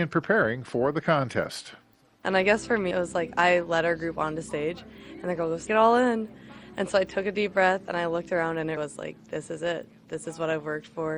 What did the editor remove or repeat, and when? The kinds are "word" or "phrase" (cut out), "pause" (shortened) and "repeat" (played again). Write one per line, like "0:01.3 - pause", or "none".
0:02.9 - word
0:05.7 - word
0:08.8 - word